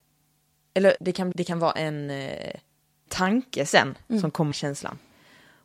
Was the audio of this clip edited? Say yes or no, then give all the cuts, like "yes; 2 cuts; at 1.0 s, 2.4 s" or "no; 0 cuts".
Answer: yes; 4 cuts; at 1.0 s, 1.3 s, 3.1 s, 4.5 s